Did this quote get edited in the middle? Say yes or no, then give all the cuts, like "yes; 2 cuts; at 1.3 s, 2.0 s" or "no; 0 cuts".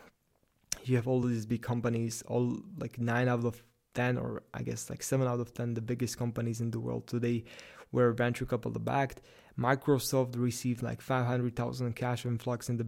no; 0 cuts